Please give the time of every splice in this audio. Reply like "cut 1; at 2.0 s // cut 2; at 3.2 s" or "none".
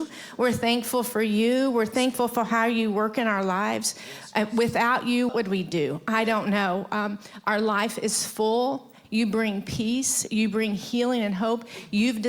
cut 1; at 5.3 s // cut 2; at 9.0 s